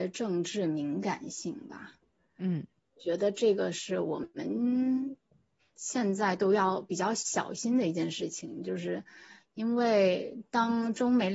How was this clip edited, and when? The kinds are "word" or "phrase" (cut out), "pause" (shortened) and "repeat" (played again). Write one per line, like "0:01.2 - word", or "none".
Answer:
none

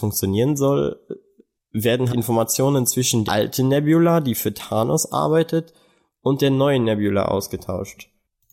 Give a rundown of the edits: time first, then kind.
0:02.1 - word
0:03.3 - word

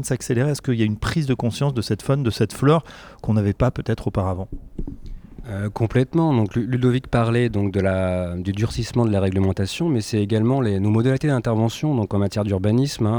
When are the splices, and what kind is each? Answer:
none

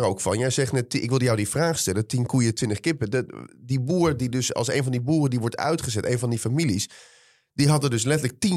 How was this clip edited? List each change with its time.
none

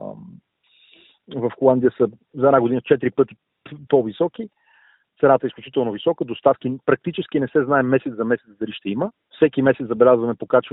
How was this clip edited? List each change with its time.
0:09.1 - pause

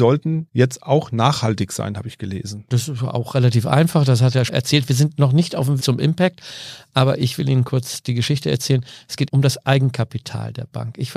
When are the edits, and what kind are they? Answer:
0:04.5 - phrase
0:05.8 - word
0:09.3 - word

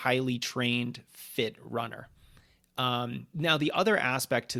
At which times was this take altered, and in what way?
none

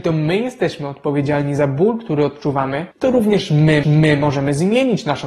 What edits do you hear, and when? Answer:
0:02.9 - pause
0:03.8 - repeat

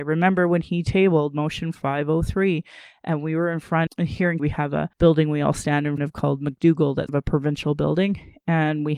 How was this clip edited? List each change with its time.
0:03.9 - word
0:04.4 - word
0:04.9 - pause
0:06.0 - word
0:07.1 - word

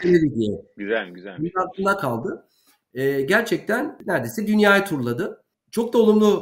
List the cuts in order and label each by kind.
none

